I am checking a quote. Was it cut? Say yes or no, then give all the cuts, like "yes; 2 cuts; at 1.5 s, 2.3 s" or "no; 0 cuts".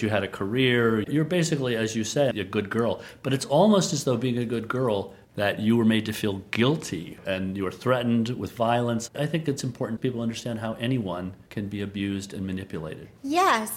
yes; 2 cuts; at 1.1 s, 5.2 s